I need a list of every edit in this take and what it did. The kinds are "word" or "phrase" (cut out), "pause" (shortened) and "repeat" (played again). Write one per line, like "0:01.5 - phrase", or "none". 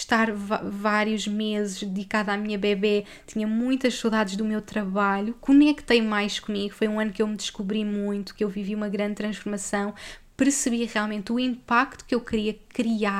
none